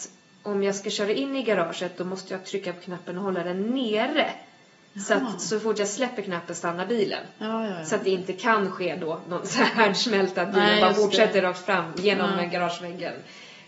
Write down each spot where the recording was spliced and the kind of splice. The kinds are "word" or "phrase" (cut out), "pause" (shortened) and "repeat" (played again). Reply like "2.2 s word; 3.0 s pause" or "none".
none